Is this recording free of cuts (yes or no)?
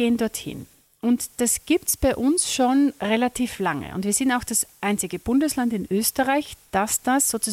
yes